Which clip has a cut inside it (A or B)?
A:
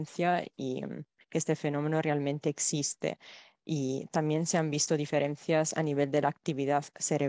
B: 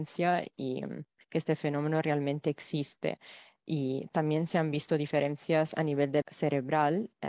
B